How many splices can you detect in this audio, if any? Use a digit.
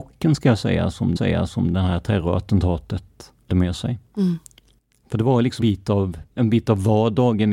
5